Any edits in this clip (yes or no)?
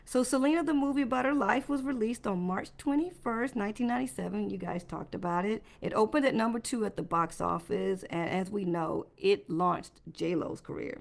yes